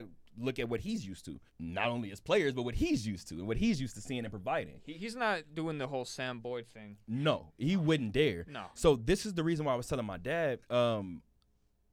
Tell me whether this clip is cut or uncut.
cut